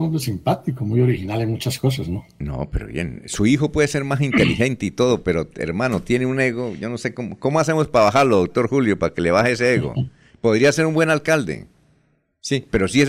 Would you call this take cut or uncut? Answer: uncut